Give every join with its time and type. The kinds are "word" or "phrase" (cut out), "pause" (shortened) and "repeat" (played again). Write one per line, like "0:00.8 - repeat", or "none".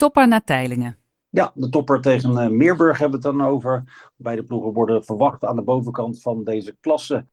none